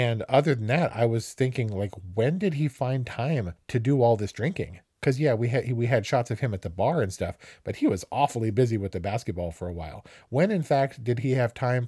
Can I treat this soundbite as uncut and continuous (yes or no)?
no